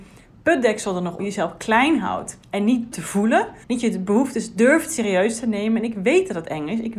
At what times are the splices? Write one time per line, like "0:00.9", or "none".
0:01.2
0:02.4
0:02.9
0:03.6